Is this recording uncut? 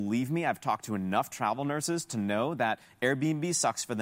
yes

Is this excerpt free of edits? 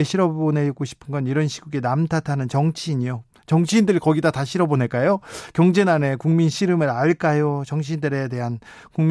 yes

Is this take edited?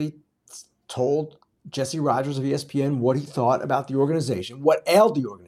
no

